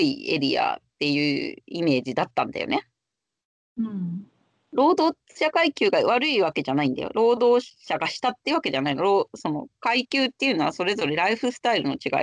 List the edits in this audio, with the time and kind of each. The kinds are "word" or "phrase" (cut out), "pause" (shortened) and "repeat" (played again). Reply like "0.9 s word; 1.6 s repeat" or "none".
none